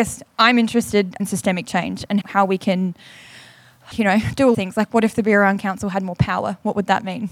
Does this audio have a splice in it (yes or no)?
yes